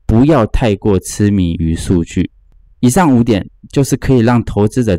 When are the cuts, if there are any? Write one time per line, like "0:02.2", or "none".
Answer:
none